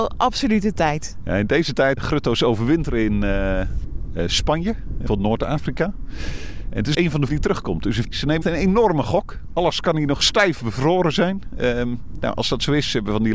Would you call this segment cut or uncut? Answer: cut